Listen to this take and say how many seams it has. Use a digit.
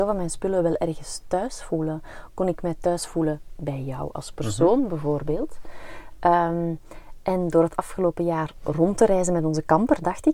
0